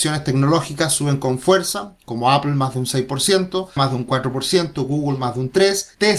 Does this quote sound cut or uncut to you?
cut